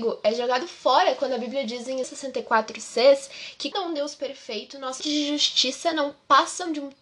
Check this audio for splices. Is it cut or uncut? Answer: cut